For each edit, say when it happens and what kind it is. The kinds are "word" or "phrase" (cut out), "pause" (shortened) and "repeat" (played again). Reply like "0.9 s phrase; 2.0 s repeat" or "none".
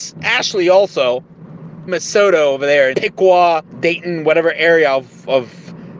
1.9 s word; 2.9 s word; 3.7 s pause